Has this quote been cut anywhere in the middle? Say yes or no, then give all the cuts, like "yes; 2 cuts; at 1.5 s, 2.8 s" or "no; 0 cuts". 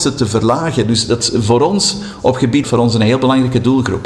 yes; 1 cut; at 2.6 s